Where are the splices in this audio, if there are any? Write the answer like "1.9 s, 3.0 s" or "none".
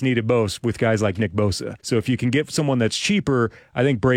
1.8 s